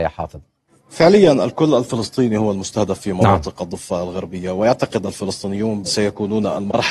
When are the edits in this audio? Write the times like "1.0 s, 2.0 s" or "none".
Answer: 5.8 s